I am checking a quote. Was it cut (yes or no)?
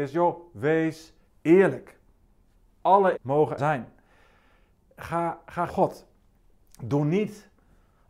yes